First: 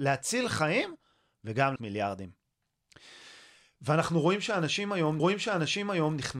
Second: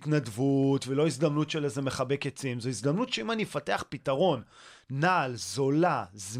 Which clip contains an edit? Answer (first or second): first